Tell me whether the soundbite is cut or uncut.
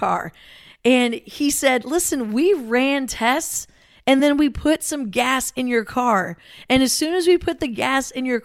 uncut